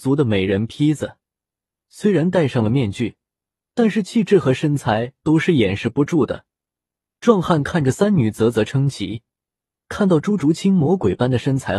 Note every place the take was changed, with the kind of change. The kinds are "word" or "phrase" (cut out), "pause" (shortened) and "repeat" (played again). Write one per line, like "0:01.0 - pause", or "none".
none